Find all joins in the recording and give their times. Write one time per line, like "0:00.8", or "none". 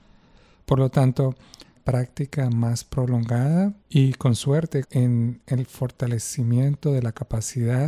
0:01.8
0:03.8
0:04.8